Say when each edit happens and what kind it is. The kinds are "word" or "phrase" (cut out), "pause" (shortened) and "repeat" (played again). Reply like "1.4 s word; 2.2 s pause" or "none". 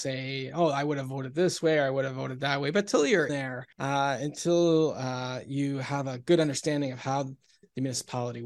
3.3 s word; 3.7 s pause